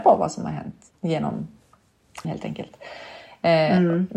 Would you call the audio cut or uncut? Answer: cut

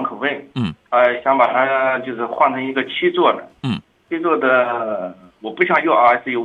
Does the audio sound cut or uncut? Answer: uncut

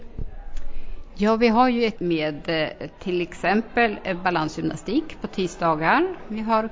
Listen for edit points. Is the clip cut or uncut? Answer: cut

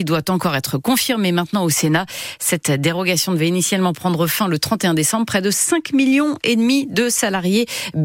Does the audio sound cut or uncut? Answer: uncut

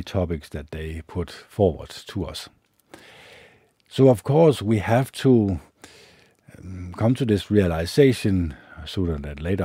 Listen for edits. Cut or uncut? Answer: uncut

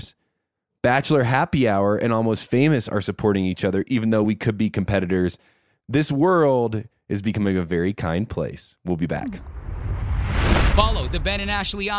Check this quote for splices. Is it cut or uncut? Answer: uncut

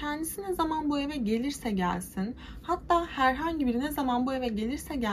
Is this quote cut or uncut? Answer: uncut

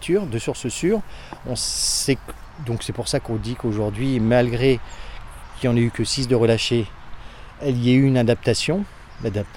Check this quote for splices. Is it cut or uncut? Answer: uncut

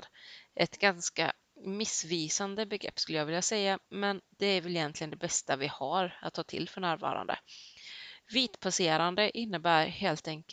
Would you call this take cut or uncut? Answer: cut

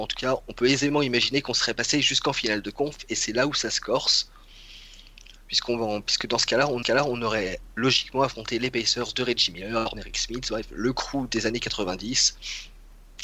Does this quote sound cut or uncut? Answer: cut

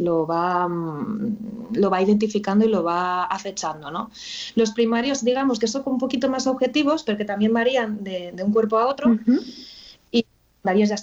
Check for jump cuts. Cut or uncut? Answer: uncut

